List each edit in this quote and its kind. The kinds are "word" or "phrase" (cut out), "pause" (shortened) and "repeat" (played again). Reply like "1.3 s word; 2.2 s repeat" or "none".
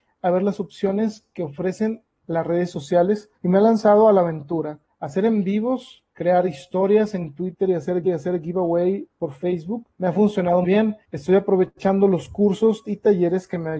3.3 s pause; 4.8 s pause; 6.1 s pause; 7.2 s phrase; 8.0 s repeat; 9.9 s pause; 10.6 s word; 11.0 s pause; 12.8 s word